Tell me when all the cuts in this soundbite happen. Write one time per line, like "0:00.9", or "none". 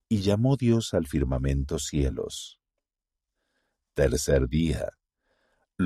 none